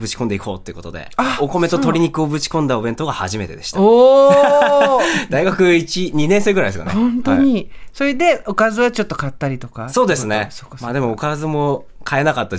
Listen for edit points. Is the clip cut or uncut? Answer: uncut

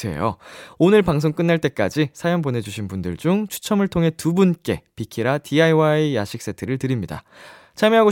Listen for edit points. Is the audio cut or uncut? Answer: uncut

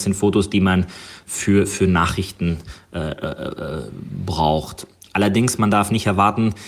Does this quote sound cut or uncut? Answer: uncut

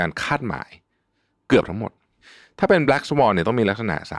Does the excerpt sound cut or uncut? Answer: uncut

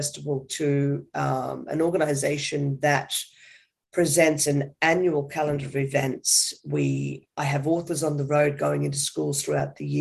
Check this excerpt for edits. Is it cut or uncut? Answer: uncut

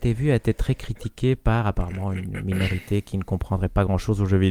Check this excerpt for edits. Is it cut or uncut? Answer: uncut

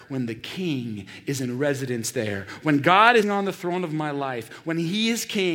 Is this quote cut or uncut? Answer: cut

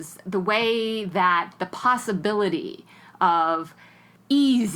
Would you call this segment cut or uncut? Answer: uncut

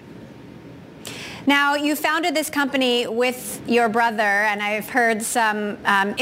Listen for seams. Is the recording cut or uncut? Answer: uncut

